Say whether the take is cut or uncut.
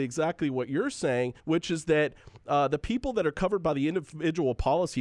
cut